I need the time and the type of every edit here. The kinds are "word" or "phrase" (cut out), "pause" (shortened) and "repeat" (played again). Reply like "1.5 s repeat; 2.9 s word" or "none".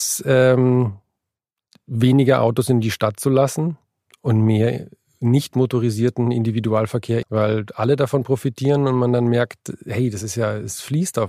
7.2 s phrase